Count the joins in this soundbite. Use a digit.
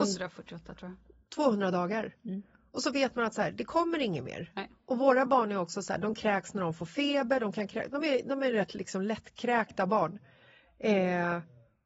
0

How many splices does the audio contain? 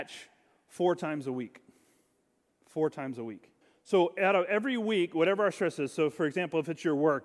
1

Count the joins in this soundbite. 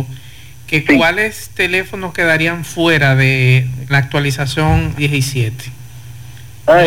2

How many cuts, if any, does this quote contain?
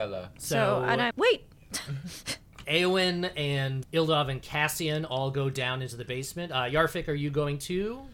3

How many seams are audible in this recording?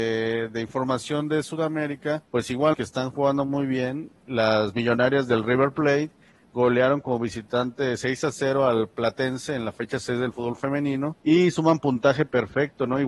3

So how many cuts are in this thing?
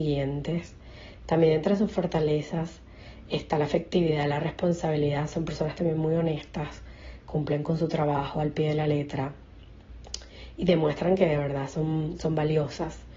0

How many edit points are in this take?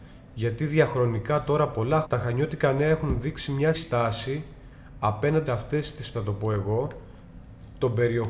4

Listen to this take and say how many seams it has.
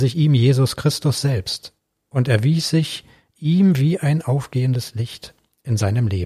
0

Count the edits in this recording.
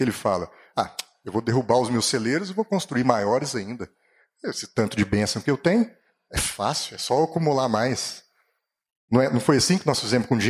0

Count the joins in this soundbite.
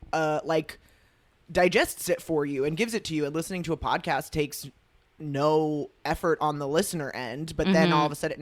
0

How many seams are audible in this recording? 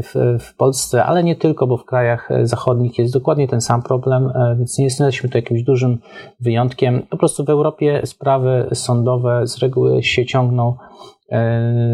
1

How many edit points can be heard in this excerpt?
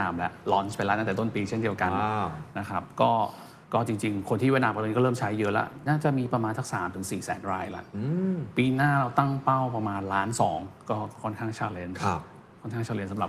1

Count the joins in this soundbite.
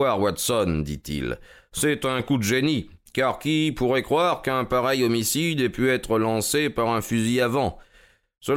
0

